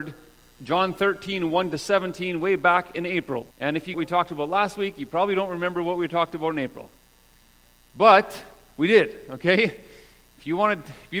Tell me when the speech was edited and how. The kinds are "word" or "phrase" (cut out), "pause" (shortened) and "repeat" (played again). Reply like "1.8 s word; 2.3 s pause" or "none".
3.5 s pause; 3.9 s phrase